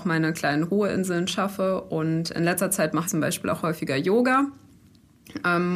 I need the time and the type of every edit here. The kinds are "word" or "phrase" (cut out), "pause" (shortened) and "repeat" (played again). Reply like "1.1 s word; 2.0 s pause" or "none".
3.0 s word